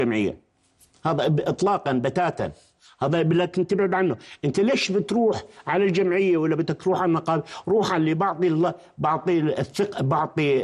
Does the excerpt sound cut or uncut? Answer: uncut